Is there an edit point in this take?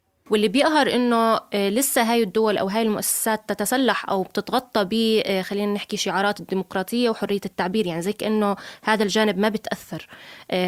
no; 0 cuts

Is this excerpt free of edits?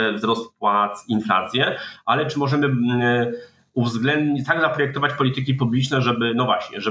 yes; 0 cuts

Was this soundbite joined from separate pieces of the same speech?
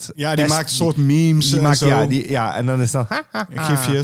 no; 0 cuts

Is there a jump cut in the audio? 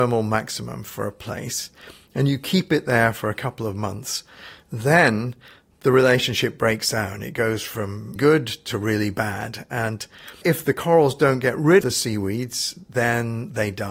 yes; 3 cuts; at 8.2 s, 10.4 s, 11.8 s

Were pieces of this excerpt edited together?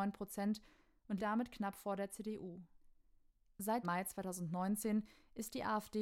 yes; 2 cuts; at 1.2 s, 3.8 s

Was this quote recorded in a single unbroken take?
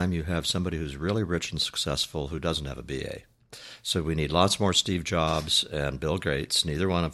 yes; 0 cuts

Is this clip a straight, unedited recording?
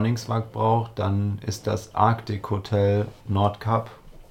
no; 1 cut; at 3.2 s

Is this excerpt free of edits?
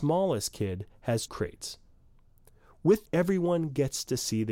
no; 2 cuts; at 1.3 s, 3.0 s

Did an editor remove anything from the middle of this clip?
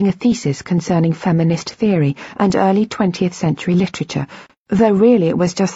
no; 0 cuts

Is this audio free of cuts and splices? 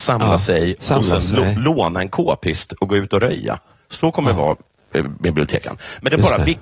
yes; 0 cuts

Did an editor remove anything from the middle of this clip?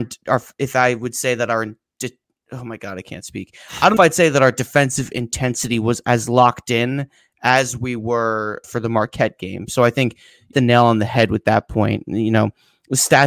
yes; 3 cuts; at 4.0 s, 8.6 s, 10.5 s

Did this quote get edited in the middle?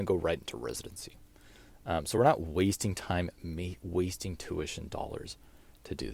no; 0 cuts

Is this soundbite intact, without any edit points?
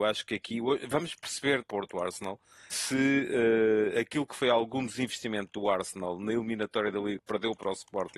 no; 3 cuts; at 1.6 s, 2.7 s, 7.2 s

